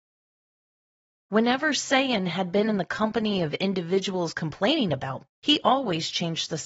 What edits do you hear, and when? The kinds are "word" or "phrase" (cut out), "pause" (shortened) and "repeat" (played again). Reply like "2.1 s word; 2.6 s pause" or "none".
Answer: 5.3 s word